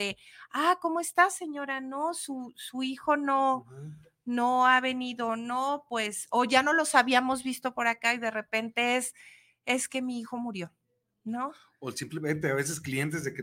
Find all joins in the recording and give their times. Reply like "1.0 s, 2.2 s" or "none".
none